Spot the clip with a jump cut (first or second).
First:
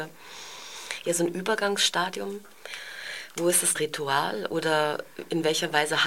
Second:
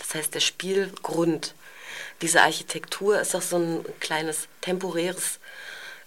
first